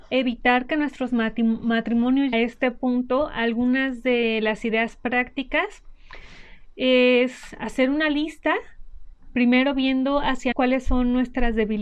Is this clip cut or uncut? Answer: cut